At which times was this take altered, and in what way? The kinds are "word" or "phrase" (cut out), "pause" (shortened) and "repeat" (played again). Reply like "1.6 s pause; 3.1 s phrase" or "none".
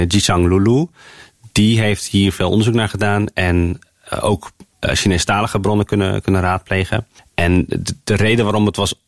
none